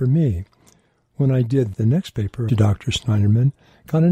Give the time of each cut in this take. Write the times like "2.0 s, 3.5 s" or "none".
1.7 s, 2.5 s